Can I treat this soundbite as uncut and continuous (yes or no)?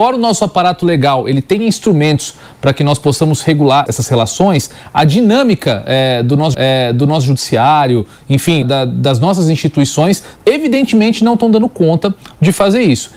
no